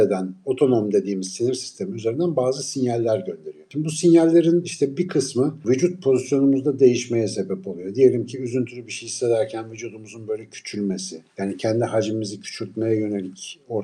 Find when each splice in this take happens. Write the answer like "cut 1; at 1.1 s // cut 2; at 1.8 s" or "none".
cut 1; at 11.3 s